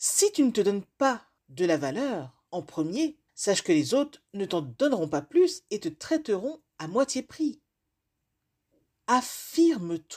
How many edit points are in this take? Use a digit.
3